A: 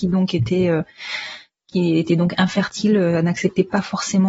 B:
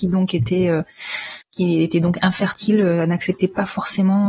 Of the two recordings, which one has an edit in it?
B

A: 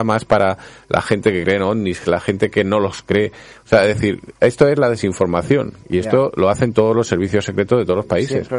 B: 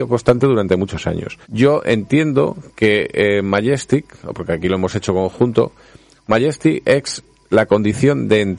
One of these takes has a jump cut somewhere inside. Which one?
B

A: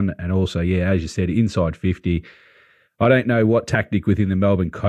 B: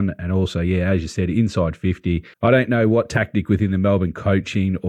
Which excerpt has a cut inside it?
B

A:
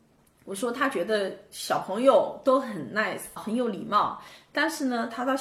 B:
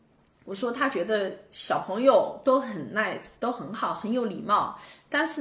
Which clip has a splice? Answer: A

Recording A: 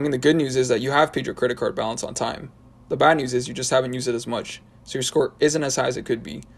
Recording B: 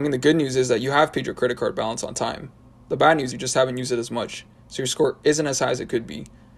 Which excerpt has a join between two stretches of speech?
B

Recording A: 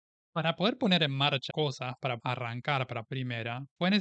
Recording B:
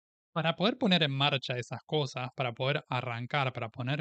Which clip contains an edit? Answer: A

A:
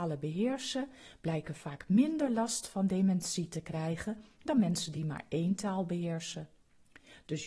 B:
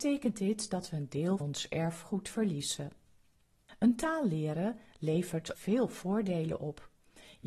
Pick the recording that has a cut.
B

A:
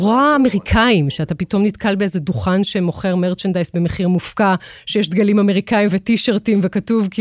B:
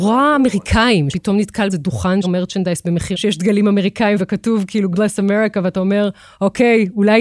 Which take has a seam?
B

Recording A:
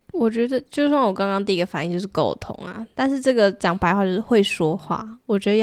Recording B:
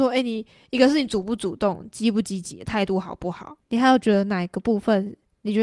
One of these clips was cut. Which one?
B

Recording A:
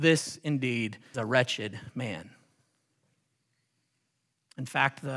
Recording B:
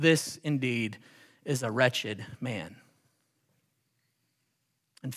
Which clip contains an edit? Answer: A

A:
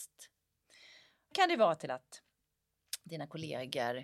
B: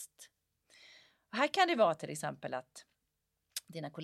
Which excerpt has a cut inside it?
A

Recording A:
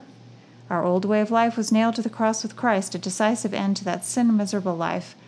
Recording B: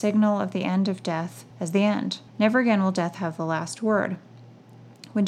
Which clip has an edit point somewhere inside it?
B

